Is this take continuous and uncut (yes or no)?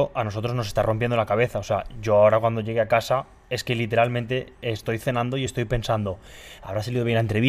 yes